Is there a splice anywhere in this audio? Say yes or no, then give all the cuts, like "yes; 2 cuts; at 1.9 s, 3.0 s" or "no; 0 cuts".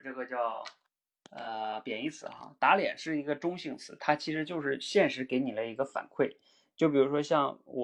no; 0 cuts